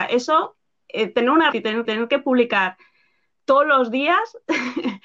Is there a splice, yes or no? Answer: yes